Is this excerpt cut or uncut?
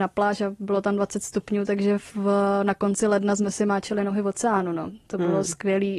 uncut